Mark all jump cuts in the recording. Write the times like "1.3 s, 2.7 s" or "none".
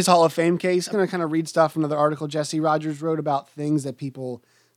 0.9 s